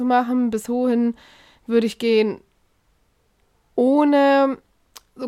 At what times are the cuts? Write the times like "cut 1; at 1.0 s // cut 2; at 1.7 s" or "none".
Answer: none

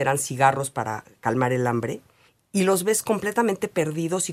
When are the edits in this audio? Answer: cut 1; at 2.3 s

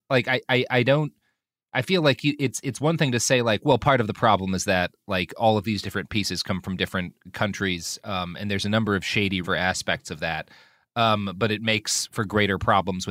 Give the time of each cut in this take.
cut 1; at 9.4 s

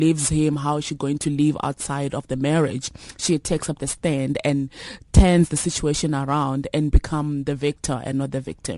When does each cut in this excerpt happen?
cut 1; at 5.0 s

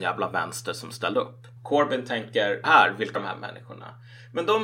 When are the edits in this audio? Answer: cut 1; at 1.6 s // cut 2; at 2.6 s // cut 3; at 3.1 s

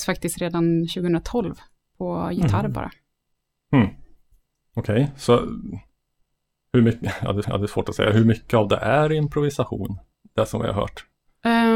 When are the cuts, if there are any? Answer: cut 1; at 7.4 s

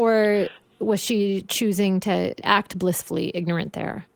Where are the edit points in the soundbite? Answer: cut 1; at 2.4 s

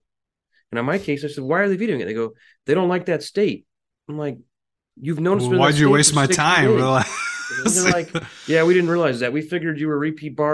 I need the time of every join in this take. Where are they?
none

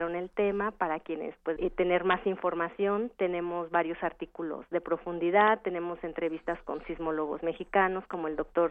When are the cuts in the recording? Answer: cut 1; at 1.6 s

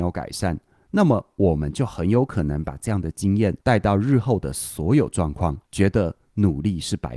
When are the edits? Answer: cut 1; at 3.6 s // cut 2; at 5.6 s

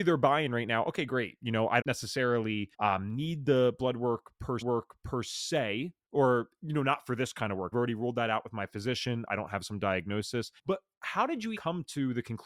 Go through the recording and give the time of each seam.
cut 1; at 1.8 s // cut 2; at 2.7 s // cut 3; at 4.6 s // cut 4; at 7.7 s // cut 5; at 10.6 s // cut 6; at 11.6 s

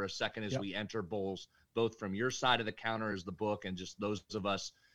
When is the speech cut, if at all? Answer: none

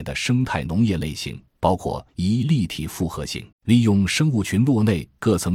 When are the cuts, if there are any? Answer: cut 1; at 1.5 s // cut 2; at 2.1 s // cut 3; at 3.5 s

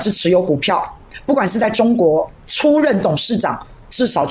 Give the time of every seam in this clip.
cut 1; at 2.3 s

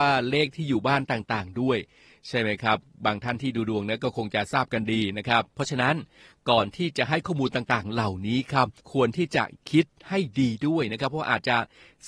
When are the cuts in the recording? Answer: cut 1; at 5.5 s // cut 2; at 8.8 s

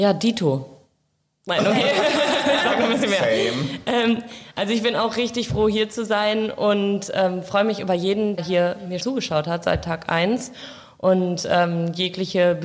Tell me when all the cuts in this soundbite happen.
cut 1; at 8.4 s // cut 2; at 9.0 s

